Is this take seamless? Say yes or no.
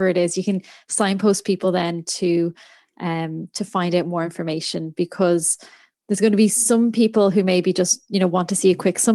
yes